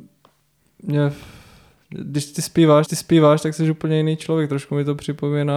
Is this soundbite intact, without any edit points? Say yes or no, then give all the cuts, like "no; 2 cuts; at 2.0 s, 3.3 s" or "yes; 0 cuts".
no; 1 cut; at 2.9 s